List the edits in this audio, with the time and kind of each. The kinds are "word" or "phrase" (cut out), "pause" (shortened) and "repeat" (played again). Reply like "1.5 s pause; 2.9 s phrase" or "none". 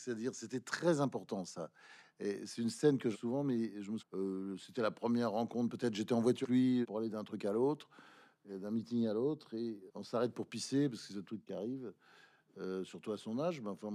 3.1 s word; 4.0 s word; 6.4 s word; 6.8 s word; 9.9 s word; 11.5 s word